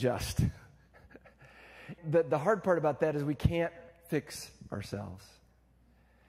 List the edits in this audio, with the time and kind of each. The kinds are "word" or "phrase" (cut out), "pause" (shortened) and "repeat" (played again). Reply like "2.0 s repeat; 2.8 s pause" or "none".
2.0 s phrase